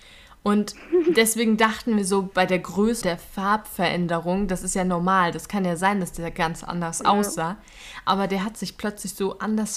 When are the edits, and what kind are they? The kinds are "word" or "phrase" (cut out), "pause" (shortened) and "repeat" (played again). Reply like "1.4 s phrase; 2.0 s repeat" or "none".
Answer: 3.0 s word